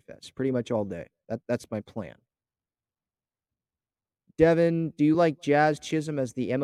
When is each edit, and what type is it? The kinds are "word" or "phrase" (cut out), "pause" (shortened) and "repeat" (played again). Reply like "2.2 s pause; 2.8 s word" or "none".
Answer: none